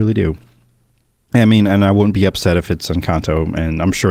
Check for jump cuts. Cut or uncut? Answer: uncut